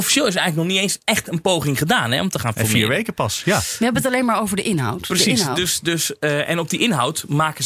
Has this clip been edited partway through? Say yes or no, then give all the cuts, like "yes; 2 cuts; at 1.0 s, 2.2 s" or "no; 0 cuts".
no; 0 cuts